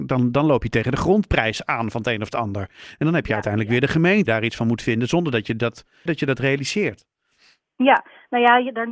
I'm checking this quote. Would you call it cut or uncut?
cut